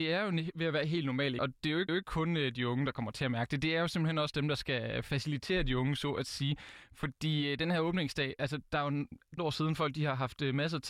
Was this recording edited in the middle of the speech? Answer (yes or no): yes